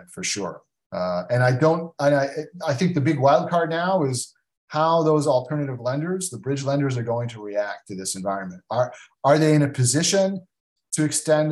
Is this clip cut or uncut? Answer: uncut